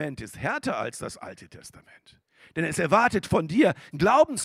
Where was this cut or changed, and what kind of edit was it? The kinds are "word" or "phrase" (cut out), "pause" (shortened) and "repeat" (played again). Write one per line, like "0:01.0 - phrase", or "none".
none